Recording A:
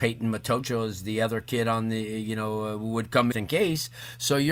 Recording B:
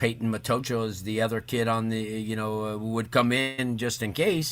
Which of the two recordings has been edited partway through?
A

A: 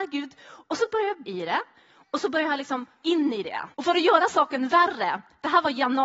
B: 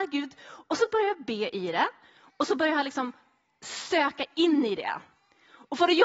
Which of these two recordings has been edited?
A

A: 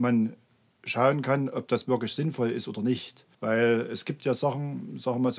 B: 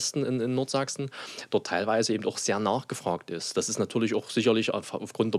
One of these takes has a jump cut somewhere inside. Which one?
A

